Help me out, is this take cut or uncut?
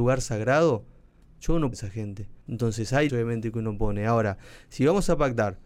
cut